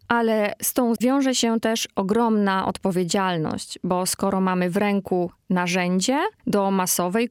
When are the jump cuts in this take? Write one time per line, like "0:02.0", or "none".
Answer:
0:01.0